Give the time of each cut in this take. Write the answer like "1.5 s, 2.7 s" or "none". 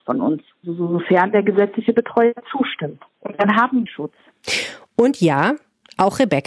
3.1 s, 3.9 s